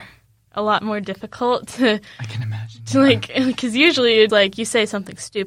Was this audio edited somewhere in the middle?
yes; 1 cut; at 4.3 s

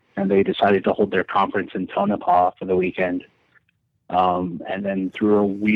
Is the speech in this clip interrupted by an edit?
no; 0 cuts

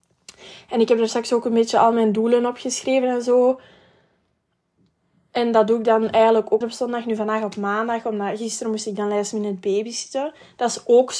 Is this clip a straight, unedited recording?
no; 1 cut; at 6.6 s

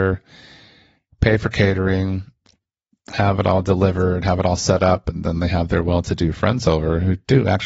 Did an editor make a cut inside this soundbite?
no; 0 cuts

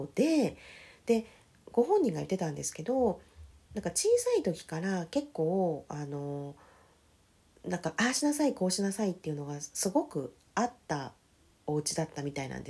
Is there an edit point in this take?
no; 0 cuts

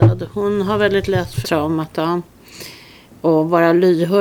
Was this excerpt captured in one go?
no; 1 cut; at 1.4 s

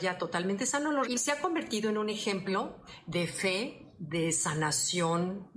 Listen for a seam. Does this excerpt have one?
yes; 1 cut; at 1.0 s

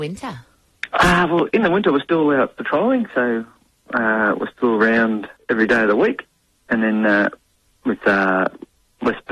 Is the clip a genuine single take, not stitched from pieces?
yes; 0 cuts

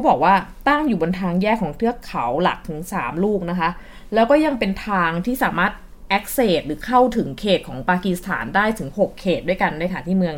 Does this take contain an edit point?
no; 0 cuts

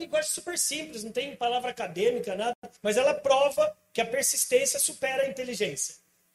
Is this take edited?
yes; 1 cut; at 2.8 s

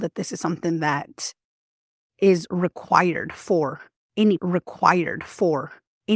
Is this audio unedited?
no; 1 cut; at 4.4 s

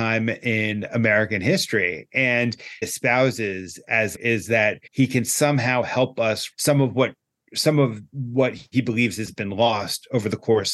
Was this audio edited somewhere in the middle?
yes; 4 cuts; at 2.8 s, 4.1 s, 4.9 s, 6.5 s

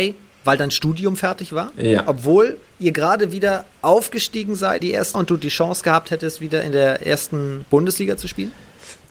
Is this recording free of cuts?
no; 2 cuts; at 4.8 s, 5.1 s

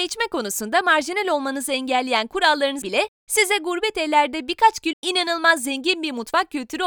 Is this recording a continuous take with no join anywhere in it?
no; 2 cuts; at 2.8 s, 4.9 s

